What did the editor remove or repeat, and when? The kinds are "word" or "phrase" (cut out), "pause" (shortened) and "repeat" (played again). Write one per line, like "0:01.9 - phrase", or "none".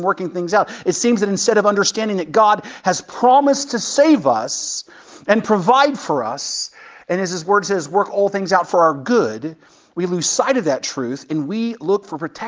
none